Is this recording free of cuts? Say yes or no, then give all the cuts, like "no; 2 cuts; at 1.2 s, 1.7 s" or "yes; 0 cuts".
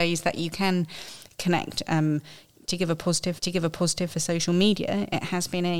no; 1 cut; at 3.4 s